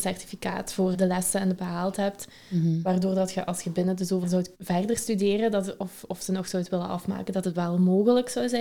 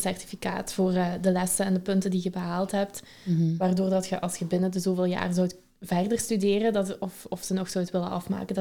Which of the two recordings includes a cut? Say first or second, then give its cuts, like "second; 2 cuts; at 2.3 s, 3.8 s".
first; 4 cuts; at 0.9 s, 1.6 s, 4.2 s, 4.5 s